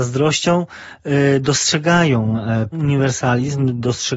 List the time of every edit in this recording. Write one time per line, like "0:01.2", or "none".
0:02.7